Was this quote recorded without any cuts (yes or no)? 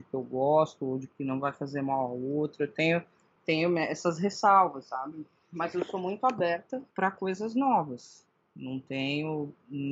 yes